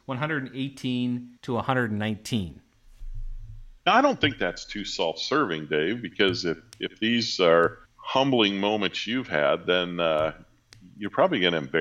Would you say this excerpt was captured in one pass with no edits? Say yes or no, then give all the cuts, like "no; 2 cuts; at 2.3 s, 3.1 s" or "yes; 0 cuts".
no; 3 cuts; at 1.4 s, 3.8 s, 7.9 s